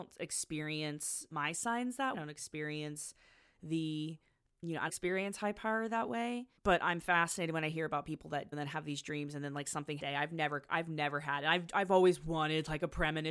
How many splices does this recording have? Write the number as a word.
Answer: seven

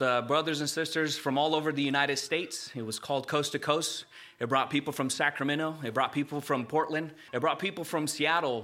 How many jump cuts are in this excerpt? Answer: one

